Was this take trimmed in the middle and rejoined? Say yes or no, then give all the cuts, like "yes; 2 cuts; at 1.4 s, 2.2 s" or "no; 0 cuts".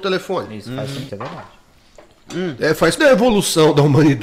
yes; 2 cuts; at 1.1 s, 3.0 s